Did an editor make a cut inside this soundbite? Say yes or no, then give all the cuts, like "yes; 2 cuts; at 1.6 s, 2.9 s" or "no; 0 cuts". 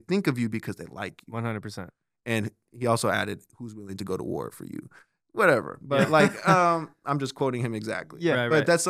no; 0 cuts